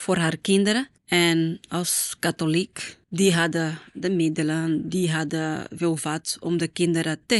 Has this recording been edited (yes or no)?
yes